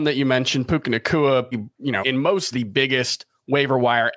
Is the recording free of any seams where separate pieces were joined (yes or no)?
no